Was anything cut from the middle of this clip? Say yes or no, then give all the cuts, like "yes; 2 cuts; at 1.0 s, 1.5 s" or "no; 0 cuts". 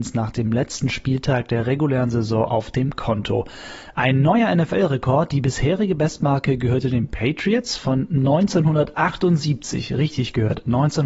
no; 0 cuts